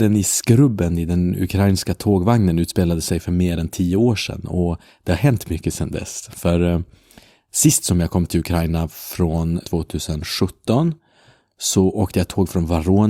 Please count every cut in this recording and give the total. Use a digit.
1